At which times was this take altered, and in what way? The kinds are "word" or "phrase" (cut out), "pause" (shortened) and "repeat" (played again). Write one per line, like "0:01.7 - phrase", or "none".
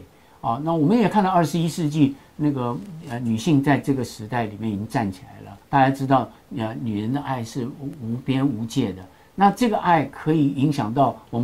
0:05.6 - pause